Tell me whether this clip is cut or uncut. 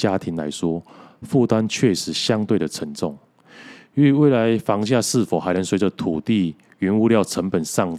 uncut